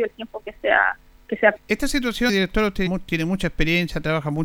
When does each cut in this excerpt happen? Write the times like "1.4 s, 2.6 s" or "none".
1.5 s, 2.3 s, 2.9 s